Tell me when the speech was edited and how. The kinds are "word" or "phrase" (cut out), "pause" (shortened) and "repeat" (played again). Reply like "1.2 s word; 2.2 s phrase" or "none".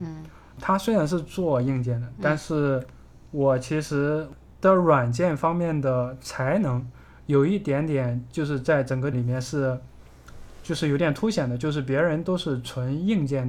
9.1 s word